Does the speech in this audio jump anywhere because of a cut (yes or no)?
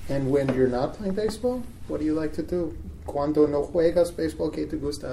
no